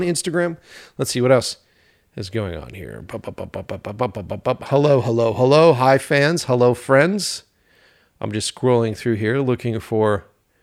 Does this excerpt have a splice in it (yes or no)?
no